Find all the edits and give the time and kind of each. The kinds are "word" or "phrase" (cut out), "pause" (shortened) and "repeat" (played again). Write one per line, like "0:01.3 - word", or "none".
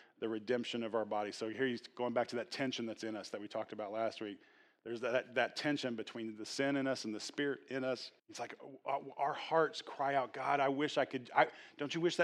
0:08.2 - pause